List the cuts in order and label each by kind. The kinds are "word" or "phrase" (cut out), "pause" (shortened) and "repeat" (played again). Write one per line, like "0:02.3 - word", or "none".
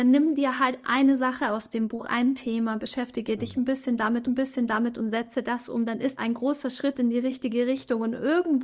0:04.2 - repeat
0:06.2 - phrase